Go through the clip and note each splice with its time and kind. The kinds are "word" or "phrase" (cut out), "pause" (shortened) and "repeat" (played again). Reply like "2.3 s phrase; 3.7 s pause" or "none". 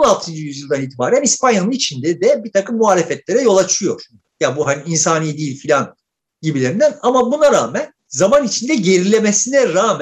8.0 s pause